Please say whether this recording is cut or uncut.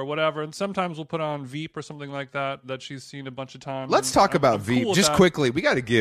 uncut